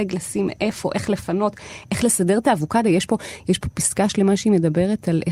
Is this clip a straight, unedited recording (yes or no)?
yes